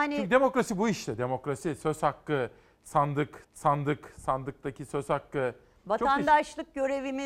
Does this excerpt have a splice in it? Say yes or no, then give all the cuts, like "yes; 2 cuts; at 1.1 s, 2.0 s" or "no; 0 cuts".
yes; 1 cut; at 3.4 s